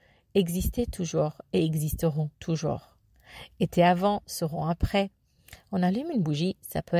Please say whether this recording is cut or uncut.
cut